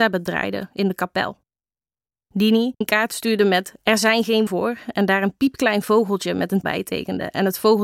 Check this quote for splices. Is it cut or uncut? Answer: cut